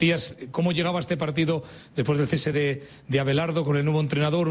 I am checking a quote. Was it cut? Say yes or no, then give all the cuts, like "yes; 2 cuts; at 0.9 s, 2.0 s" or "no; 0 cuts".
no; 0 cuts